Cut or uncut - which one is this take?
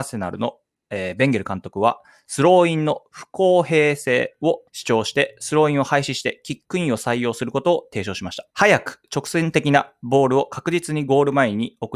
cut